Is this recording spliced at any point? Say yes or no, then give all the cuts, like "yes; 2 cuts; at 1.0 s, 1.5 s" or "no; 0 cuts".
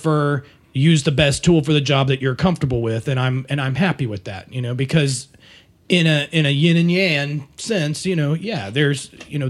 no; 0 cuts